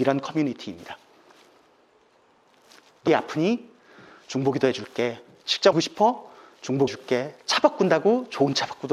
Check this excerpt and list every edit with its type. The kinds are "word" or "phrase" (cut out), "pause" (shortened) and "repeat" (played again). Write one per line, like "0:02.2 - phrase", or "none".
0:03.1 - word
0:05.7 - word
0:06.9 - word